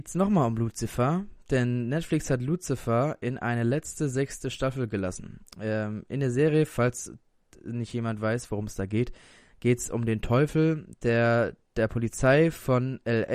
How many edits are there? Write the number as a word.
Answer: zero